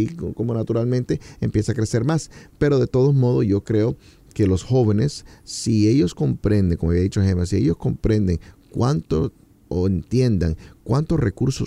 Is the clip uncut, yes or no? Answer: yes